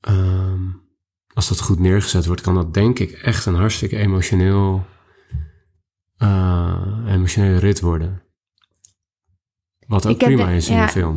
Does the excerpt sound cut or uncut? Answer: uncut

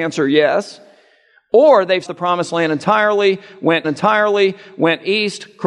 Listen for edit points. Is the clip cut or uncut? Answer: cut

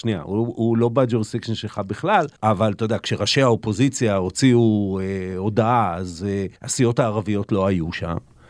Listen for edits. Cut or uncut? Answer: cut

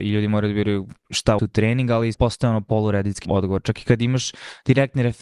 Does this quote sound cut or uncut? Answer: cut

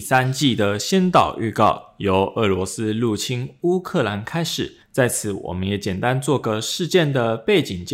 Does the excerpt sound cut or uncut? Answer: cut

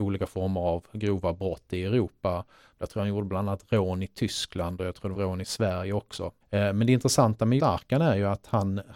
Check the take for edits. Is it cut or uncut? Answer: cut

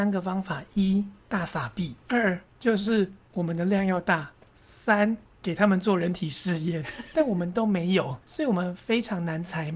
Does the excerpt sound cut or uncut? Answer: cut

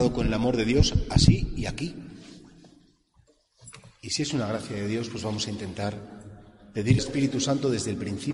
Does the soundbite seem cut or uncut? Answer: cut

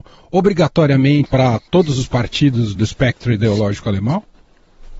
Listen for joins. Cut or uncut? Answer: cut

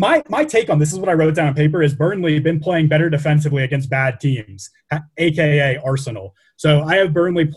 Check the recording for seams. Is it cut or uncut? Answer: uncut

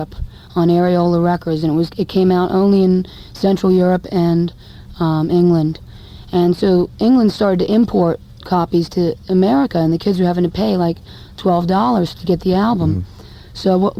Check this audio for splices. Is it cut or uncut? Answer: uncut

